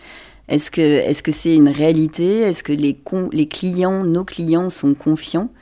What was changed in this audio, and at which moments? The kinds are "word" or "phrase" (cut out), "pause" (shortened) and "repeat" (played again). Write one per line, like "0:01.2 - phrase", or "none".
none